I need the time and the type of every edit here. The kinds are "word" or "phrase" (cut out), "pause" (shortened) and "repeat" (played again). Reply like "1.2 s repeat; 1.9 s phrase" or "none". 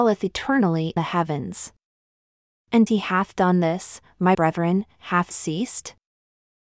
1.0 s word; 2.9 s word; 4.3 s word; 5.3 s word